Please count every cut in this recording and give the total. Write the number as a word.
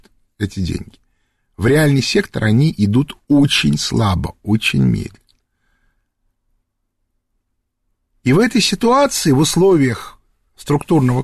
zero